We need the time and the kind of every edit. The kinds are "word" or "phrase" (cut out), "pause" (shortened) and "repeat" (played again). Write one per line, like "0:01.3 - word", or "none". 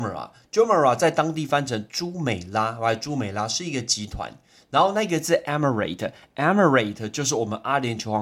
none